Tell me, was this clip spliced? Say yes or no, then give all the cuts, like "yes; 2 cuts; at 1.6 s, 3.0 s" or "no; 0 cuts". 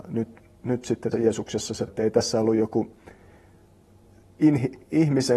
yes; 2 cuts; at 1.1 s, 1.9 s